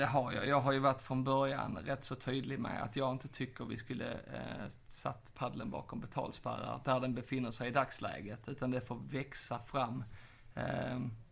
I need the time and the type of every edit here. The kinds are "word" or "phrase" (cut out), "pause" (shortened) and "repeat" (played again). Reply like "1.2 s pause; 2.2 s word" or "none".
none